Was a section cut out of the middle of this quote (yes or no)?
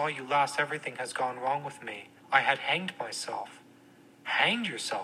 yes